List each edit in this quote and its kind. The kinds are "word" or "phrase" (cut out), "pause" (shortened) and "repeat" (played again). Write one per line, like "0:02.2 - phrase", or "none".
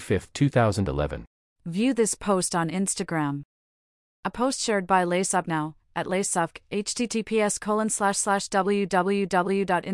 none